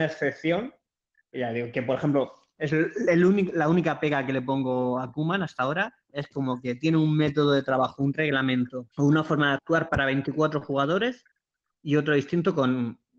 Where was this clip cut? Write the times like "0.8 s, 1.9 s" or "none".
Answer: 8.9 s